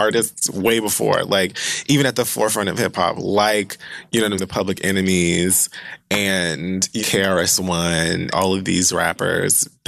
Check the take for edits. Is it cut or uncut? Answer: cut